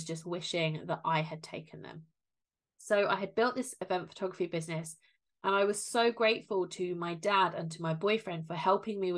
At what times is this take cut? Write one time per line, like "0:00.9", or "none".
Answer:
none